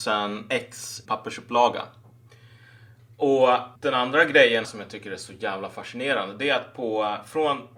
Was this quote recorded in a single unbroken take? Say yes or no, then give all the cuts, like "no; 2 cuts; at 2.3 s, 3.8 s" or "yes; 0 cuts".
no; 3 cuts; at 1.1 s, 3.8 s, 4.6 s